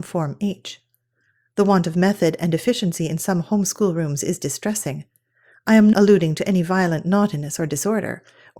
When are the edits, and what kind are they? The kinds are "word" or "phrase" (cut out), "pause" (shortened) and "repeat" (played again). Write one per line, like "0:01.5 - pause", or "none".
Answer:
0:05.9 - word